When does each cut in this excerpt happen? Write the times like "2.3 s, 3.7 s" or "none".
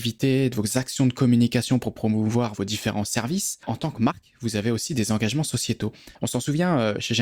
3.6 s, 6.1 s